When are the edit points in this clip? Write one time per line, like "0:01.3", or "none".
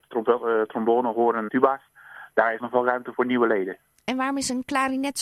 0:01.5
0:02.6
0:03.1